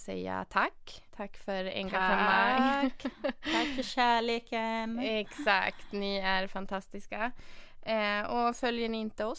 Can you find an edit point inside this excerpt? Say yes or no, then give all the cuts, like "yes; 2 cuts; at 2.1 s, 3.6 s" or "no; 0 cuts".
yes; 1 cut; at 1.1 s